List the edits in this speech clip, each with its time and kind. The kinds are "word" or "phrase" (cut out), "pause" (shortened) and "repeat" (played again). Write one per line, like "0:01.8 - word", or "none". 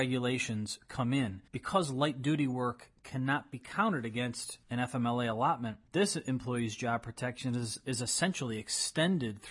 0:01.5 - pause
0:04.6 - pause
0:05.9 - pause